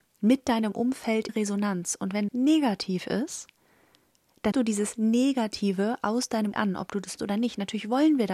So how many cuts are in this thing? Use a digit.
5